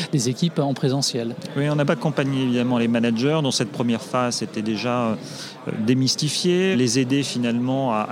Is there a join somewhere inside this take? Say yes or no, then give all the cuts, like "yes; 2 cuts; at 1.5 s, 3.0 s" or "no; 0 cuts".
yes; 2 cuts; at 1.9 s, 6.7 s